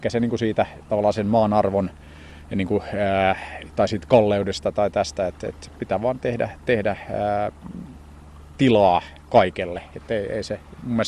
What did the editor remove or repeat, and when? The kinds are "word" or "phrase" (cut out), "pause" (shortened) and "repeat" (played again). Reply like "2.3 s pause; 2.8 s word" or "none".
none